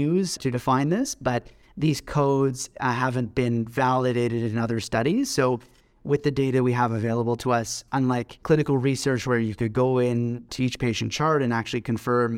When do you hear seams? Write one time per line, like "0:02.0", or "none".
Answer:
0:07.9